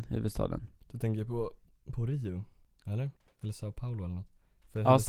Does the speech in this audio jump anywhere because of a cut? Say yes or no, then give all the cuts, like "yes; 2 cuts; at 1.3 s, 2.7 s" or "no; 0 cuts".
no; 0 cuts